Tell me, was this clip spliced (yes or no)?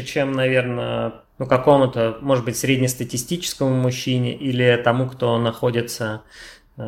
no